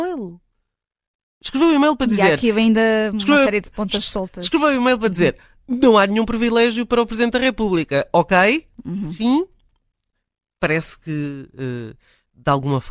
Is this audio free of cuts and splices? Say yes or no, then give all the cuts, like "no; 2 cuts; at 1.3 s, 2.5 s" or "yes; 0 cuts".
yes; 0 cuts